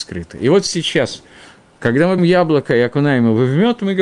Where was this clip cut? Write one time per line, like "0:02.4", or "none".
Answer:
0:02.2